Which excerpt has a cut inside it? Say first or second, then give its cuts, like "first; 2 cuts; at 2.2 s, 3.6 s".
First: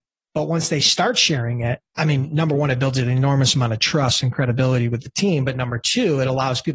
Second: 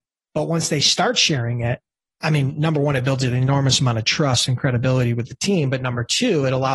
first; 1 cut; at 1.9 s